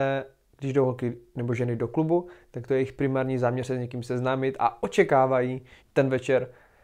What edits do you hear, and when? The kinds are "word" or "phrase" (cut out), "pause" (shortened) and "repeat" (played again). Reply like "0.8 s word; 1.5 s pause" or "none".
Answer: 5.8 s word